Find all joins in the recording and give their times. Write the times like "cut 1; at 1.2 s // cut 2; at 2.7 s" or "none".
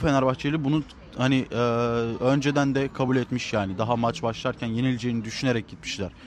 none